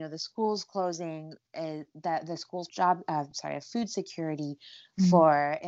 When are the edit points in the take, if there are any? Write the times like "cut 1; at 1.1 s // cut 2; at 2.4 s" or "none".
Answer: cut 1; at 2.7 s